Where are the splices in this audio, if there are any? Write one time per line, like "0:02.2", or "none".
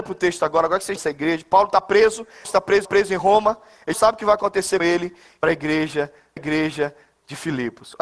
0:01.0
0:02.4
0:02.8
0:03.9
0:04.8
0:05.4
0:06.4